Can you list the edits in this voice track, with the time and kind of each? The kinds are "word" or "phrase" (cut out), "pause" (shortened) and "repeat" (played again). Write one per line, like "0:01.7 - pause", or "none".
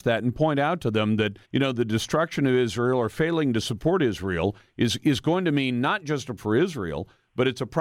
0:01.4 - pause
0:06.4 - word